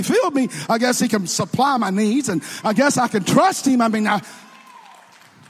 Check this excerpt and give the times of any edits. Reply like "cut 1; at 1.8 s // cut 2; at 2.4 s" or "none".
none